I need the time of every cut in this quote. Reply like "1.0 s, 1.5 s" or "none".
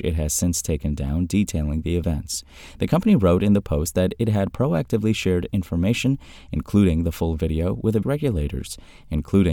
8.0 s